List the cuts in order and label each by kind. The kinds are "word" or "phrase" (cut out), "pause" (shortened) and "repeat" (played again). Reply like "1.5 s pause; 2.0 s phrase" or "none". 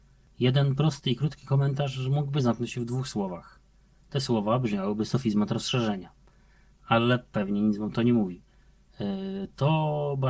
none